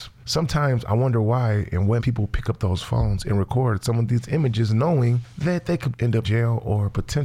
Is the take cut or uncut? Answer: cut